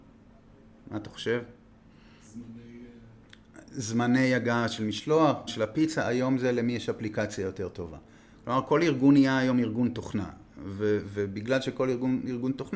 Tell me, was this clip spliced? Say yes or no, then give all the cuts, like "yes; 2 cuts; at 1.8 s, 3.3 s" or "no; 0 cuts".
yes; 1 cut; at 5.5 s